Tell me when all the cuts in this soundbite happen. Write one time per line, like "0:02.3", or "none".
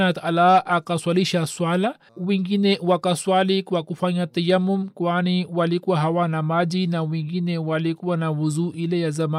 0:02.1

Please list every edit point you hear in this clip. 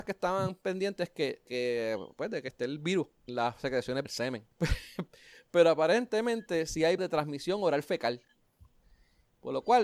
0:01.5
0:02.5
0:03.3
0:04.0
0:04.5
0:07.0

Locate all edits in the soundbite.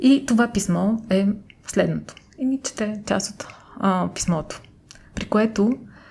none

